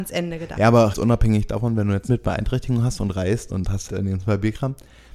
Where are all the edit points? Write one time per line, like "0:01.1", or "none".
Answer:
0:00.9
0:02.1
0:03.5
0:03.9